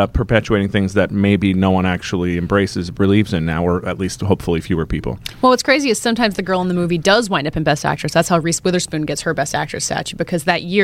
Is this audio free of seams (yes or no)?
yes